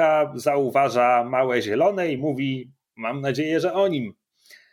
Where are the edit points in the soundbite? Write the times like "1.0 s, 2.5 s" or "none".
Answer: none